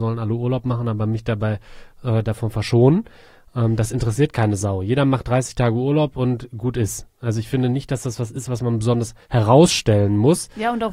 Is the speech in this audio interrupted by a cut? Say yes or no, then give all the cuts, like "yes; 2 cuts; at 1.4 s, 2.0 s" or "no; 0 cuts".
yes; 1 cut; at 9.2 s